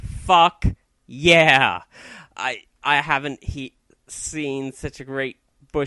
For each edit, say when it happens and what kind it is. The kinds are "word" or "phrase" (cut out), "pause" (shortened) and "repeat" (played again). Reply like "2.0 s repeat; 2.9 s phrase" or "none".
none